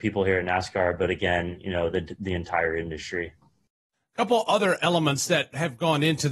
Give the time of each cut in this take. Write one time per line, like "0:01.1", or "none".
none